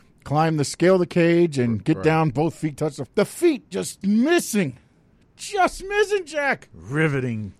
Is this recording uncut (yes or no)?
no